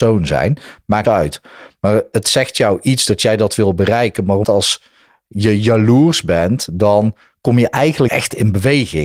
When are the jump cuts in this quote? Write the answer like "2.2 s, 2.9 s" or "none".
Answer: 1.0 s, 4.4 s, 8.1 s